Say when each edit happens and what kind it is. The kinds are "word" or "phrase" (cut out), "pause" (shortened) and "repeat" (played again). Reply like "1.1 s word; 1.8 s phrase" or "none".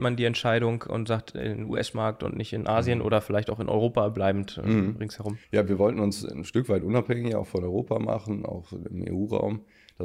5.4 s pause